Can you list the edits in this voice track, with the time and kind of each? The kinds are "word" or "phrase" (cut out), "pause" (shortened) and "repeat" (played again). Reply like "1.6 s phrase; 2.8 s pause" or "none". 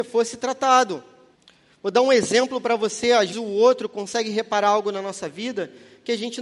1.3 s pause; 3.3 s word